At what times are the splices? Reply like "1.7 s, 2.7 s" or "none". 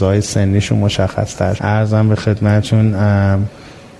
1.6 s